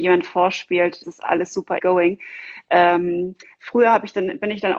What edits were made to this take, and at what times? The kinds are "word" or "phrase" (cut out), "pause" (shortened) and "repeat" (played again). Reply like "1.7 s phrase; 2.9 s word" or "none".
1.0 s word; 1.8 s phrase